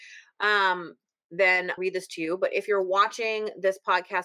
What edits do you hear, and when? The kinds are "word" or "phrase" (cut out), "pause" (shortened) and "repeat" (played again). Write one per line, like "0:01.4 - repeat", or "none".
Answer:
0:01.8 - phrase